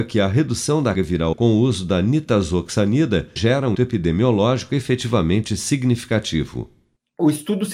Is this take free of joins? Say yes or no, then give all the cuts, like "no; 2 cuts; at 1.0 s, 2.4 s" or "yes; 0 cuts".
no; 4 cuts; at 0.9 s, 1.3 s, 3.4 s, 3.7 s